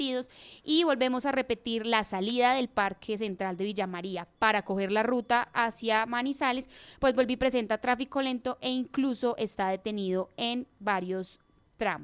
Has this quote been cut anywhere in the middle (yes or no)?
no